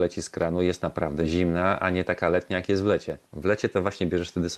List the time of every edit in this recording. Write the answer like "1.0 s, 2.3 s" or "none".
3.2 s